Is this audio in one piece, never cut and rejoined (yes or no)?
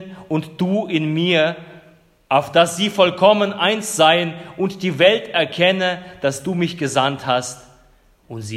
yes